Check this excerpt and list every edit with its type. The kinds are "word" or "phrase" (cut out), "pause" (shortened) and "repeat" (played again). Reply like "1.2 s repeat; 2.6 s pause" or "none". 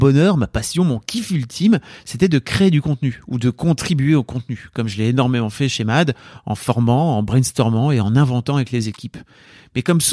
none